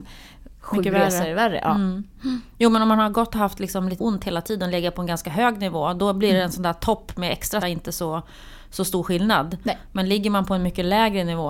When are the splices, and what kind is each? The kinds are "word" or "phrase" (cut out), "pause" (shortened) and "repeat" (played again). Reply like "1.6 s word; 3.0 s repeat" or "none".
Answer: 4.0 s word; 7.6 s word